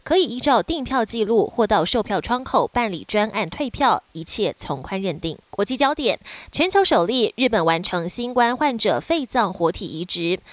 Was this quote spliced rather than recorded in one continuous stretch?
yes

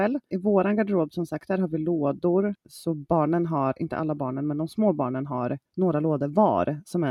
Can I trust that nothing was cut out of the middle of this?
yes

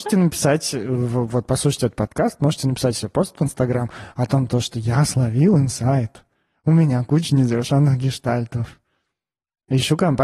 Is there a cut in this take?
no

